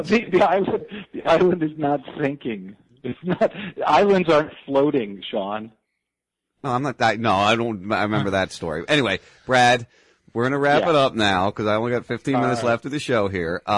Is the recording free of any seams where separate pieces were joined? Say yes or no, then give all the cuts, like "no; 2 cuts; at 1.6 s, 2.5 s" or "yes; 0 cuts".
yes; 0 cuts